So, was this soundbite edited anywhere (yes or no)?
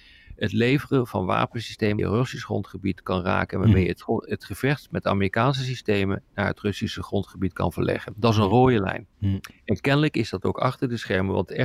yes